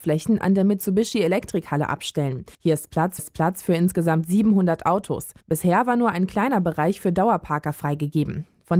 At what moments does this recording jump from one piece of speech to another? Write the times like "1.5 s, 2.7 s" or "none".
2.5 s, 3.2 s, 5.4 s